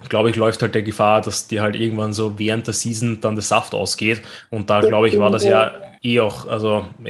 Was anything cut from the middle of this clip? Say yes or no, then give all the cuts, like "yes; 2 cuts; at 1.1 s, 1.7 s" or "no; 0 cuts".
yes; 1 cut; at 6.0 s